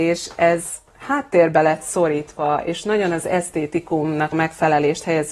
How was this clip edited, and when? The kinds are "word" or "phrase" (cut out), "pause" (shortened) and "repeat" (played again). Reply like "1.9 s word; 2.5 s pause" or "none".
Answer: 4.3 s word